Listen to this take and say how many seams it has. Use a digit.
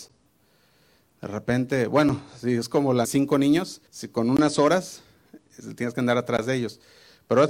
2